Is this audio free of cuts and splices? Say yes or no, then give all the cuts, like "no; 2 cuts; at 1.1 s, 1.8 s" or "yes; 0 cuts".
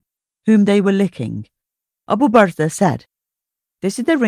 yes; 0 cuts